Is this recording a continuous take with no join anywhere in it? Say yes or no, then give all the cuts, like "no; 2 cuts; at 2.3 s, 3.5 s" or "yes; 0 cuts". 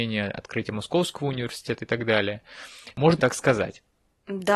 no; 1 cut; at 3.2 s